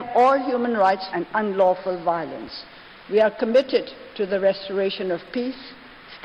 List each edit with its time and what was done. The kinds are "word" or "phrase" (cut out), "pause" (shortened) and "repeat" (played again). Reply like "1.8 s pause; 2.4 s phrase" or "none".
1.1 s word